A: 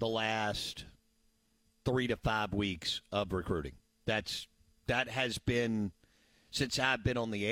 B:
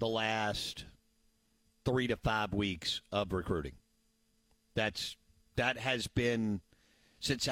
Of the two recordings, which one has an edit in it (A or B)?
A